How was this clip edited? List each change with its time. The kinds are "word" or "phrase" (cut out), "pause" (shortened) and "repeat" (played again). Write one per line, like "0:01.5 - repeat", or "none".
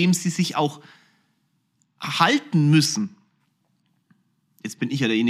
none